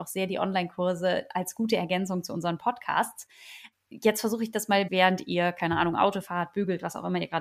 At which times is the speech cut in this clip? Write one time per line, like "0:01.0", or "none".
0:04.9